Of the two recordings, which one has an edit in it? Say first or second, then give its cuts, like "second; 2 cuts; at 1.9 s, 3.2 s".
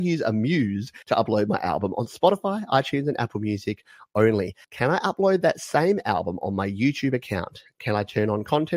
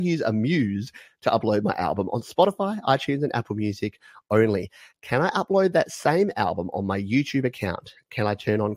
first; 2 cuts; at 1.0 s, 4.6 s